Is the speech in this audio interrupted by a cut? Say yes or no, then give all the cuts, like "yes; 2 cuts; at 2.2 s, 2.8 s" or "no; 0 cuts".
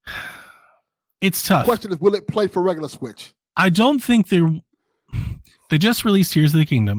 no; 0 cuts